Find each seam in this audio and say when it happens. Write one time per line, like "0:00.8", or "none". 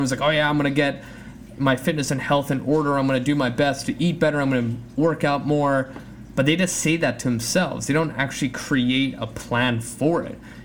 none